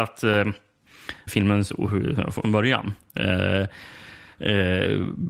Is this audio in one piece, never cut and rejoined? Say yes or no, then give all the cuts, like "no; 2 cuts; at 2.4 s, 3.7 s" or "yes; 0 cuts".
no; 2 cuts; at 1.3 s, 2.4 s